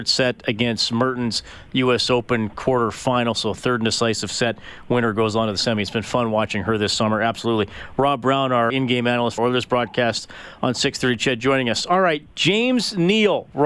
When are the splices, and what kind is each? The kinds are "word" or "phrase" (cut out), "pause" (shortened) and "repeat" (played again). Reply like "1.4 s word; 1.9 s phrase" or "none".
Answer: 8.7 s word; 9.4 s word